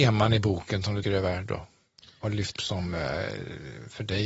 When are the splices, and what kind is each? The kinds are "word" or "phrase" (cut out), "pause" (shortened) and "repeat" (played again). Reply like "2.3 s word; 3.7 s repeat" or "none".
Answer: 1.0 s word; 2.6 s word